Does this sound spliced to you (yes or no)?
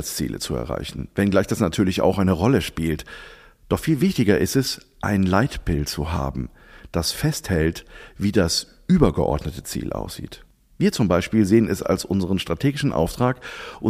no